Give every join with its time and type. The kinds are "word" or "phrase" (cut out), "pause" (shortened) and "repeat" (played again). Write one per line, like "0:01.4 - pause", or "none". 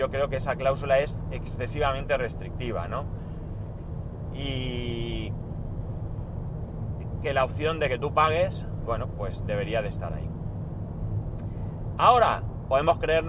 0:08.9 - word

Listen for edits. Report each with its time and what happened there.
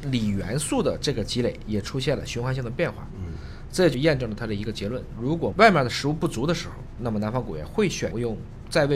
none

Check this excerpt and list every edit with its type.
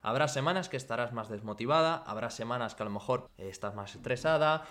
0:03.3 - word

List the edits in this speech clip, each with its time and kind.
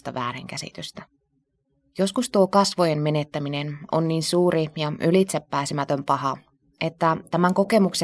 none

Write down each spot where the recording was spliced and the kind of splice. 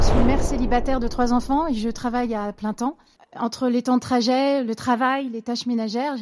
0:03.2 - pause

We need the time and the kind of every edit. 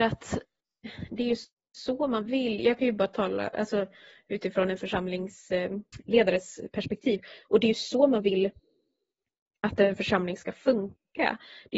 none

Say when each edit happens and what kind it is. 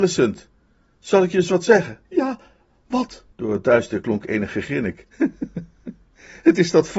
0:02.0 - pause
0:03.3 - pause

